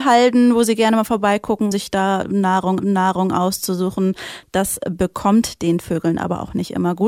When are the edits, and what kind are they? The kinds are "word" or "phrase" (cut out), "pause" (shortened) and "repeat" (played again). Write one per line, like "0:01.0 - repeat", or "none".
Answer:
0:01.7 - word
0:02.8 - repeat